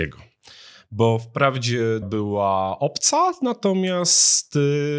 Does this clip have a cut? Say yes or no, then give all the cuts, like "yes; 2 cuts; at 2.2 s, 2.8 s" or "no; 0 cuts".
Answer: yes; 1 cut; at 2.0 s